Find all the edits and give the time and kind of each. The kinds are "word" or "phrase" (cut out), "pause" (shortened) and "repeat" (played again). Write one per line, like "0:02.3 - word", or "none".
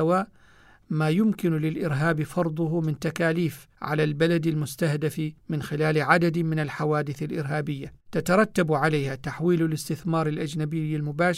0:03.7 - pause
0:05.4 - pause
0:08.0 - pause

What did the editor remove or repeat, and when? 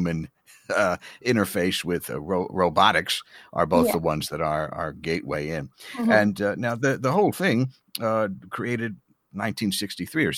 none

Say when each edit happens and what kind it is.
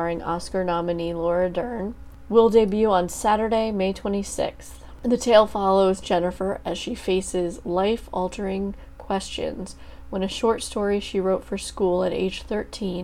none

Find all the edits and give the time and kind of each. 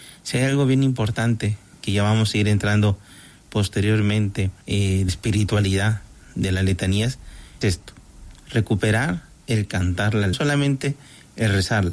0:01.7 - word
0:04.6 - pause
0:05.1 - word
0:07.6 - word
0:08.4 - pause
0:10.3 - phrase

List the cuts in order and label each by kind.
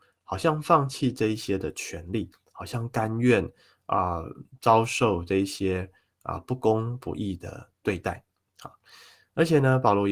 none

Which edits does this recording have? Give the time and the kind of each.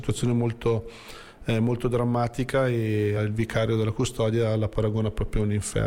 0:03.2 - phrase

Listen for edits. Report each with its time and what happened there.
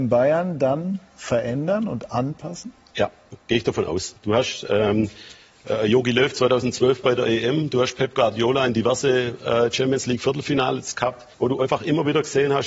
0:04.2 - pause
0:11.3 - pause

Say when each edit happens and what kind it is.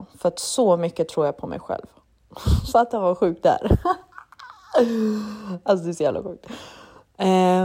none

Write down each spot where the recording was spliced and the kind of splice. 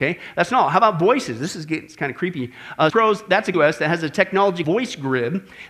0:02.9 - word
0:03.5 - phrase
0:04.6 - word

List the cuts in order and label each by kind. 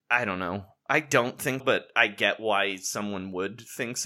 0:01.6 - word

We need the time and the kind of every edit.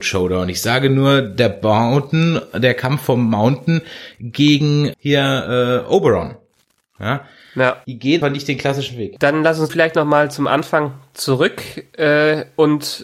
0:04.9 - word
0:08.2 - word
0:09.7 - word

